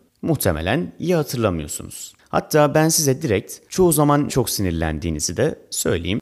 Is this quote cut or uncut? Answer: cut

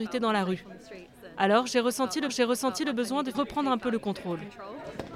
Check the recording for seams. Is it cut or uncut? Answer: cut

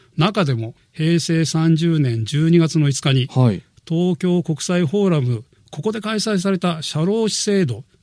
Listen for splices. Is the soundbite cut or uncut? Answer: uncut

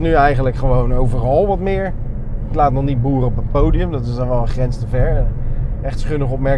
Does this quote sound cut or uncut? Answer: uncut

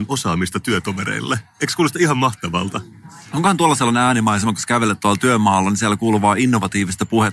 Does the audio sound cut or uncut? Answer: uncut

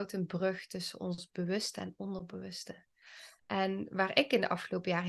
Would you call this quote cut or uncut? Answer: cut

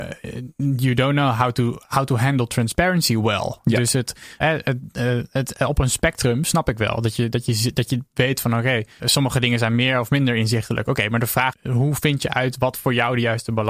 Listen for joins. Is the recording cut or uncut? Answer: cut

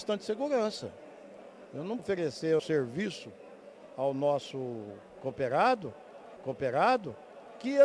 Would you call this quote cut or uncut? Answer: cut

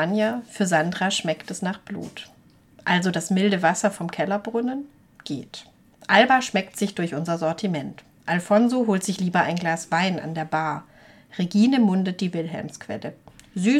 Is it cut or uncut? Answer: uncut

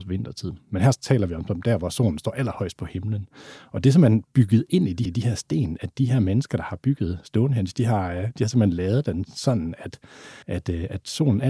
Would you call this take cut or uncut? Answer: cut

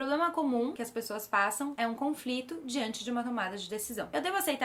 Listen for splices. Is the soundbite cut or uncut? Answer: uncut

